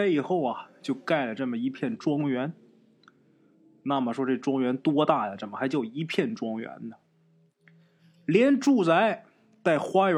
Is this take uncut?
yes; 0 cuts

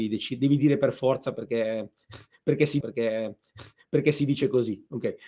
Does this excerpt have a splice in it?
yes; 1 cut; at 2.8 s

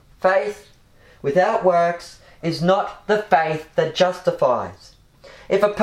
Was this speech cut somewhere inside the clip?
no; 0 cuts

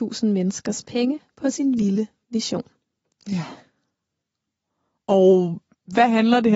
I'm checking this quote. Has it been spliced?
no; 0 cuts

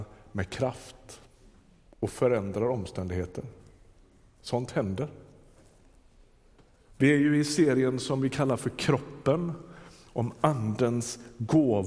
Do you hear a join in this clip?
no; 0 cuts

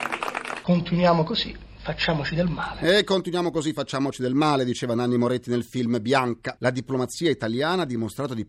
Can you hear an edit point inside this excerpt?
no; 0 cuts

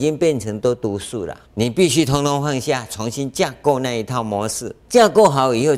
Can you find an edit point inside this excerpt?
yes; 2 cuts; at 1.4 s, 4.8 s

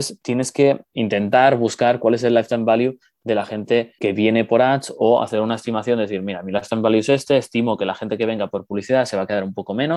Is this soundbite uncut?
no; 1 cut; at 4.0 s

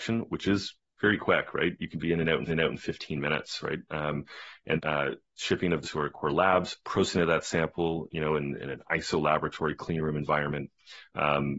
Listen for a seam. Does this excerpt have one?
yes; 3 cuts; at 2.5 s, 4.8 s, 5.8 s

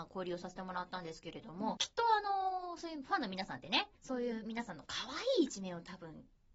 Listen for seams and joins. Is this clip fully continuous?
no; 2 cuts; at 1.8 s, 3.9 s

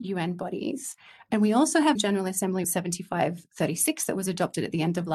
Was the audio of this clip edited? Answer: yes; 2 cuts; at 2.0 s, 2.6 s

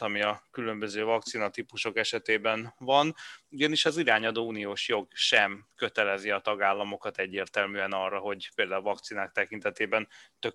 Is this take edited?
no; 0 cuts

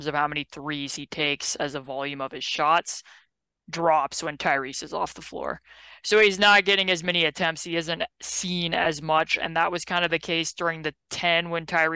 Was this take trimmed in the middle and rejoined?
no; 0 cuts

